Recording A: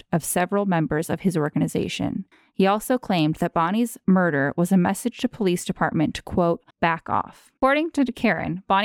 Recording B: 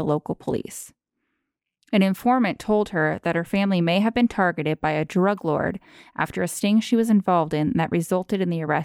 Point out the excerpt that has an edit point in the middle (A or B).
A